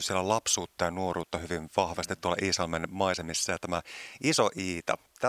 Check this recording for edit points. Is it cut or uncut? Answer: uncut